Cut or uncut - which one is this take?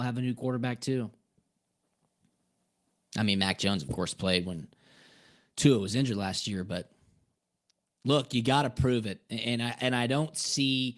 uncut